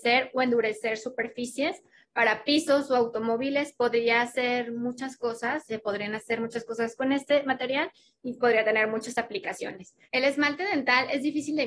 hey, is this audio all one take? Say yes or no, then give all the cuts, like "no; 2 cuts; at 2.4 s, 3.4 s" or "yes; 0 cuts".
yes; 0 cuts